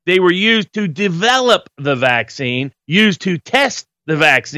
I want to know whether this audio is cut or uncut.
uncut